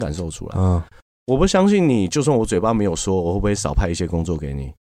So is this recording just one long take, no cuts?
yes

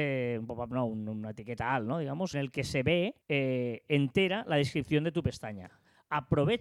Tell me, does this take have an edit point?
yes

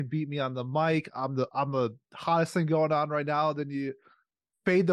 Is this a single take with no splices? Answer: yes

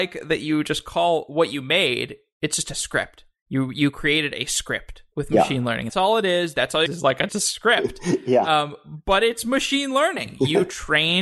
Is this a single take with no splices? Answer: no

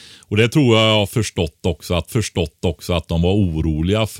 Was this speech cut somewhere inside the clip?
yes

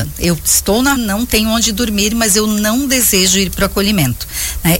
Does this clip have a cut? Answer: yes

